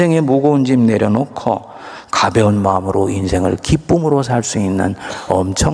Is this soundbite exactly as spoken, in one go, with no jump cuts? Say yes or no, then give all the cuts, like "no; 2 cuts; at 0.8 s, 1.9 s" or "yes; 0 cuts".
yes; 0 cuts